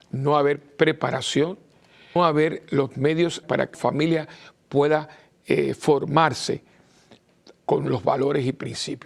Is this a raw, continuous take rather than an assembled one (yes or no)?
no